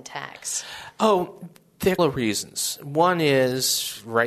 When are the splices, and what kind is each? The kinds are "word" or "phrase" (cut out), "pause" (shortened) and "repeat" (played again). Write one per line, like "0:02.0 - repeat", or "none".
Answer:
0:02.0 - word

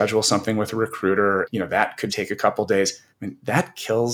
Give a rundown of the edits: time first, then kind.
0:01.4 - word
0:02.1 - word
0:03.1 - pause

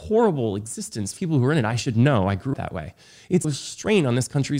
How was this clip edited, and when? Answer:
0:01.2 - word
0:02.5 - word
0:03.4 - word

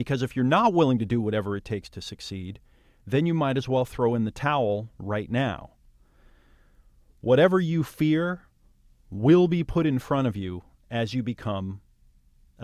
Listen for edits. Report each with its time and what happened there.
none

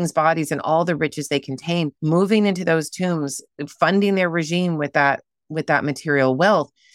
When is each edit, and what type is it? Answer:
0:02.0 - pause

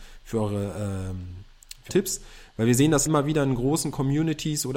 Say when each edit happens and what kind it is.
0:01.9 - word
0:03.1 - word

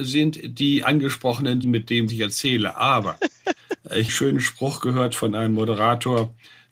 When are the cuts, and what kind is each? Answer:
0:01.6 - word
0:02.1 - word
0:04.1 - phrase

